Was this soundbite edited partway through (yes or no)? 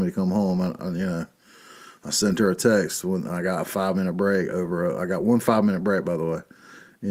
no